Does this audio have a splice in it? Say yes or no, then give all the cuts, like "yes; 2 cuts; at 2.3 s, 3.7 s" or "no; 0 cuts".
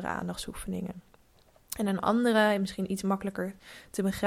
no; 0 cuts